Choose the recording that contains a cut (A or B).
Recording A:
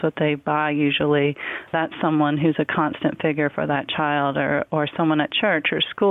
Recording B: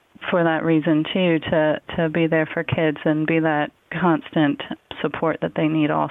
B